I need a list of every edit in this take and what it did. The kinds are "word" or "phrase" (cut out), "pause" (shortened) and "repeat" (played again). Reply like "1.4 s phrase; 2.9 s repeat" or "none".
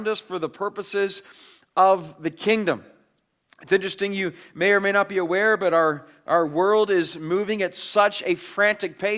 none